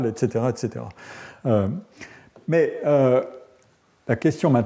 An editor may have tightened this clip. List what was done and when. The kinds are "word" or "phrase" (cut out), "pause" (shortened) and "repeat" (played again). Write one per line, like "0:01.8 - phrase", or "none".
none

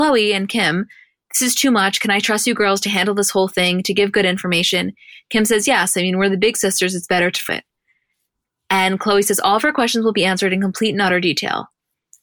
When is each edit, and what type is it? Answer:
0:07.5 - phrase

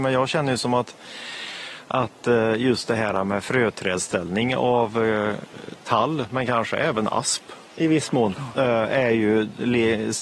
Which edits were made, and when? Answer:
0:07.7 - pause

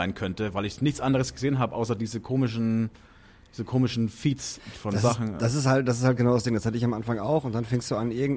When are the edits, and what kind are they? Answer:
none

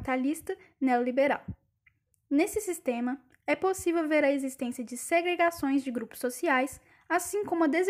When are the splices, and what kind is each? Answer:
none

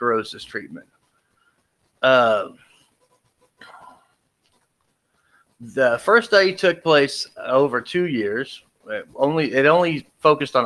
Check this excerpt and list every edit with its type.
none

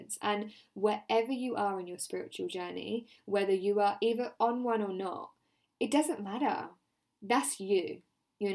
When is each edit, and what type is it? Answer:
none

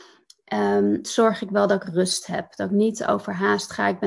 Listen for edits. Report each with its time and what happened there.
0:01.0 - phrase

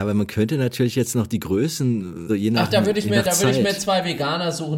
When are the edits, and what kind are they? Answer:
0:02.3 - word

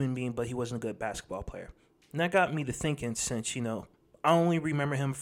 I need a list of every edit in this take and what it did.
none

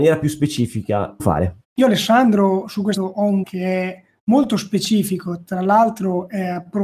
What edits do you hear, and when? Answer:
0:01.2 - phrase
0:01.6 - pause
0:03.0 - word
0:03.4 - word

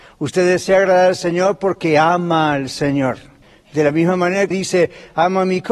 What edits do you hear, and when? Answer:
0:03.4 - pause
0:04.5 - word

